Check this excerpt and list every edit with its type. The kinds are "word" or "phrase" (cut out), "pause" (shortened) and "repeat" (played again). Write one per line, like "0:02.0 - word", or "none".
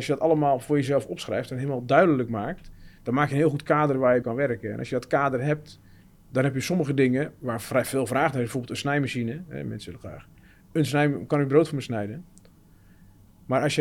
0:04.2 - word